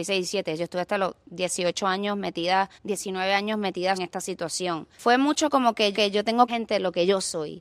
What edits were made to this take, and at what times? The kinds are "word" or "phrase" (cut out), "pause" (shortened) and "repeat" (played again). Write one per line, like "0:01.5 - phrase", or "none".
0:01.2 - pause
0:02.7 - pause
0:03.9 - phrase
0:04.9 - pause
0:05.9 - repeat
0:06.5 - phrase